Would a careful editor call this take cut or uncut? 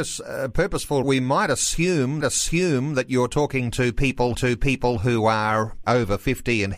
cut